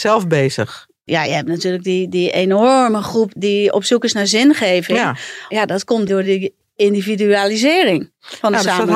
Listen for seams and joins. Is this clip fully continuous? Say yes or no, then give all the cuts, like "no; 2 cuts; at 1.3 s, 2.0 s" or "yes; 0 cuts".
yes; 0 cuts